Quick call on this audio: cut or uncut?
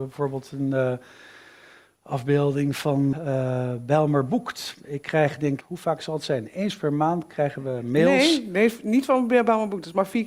cut